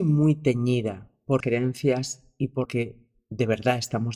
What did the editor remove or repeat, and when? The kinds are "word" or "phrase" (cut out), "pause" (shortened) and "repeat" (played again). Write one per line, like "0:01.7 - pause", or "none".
0:01.4 - word
0:02.7 - word